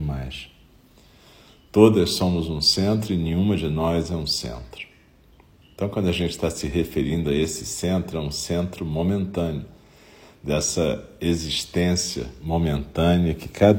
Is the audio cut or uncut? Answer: uncut